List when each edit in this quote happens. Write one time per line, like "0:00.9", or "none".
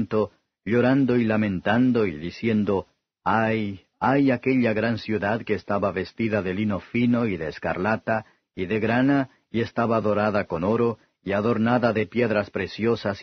none